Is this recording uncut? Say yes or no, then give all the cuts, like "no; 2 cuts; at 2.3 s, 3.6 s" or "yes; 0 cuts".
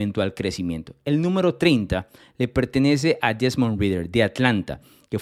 yes; 0 cuts